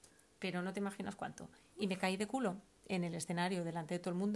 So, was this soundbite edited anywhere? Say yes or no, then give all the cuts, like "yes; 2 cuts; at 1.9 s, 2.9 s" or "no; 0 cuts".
no; 0 cuts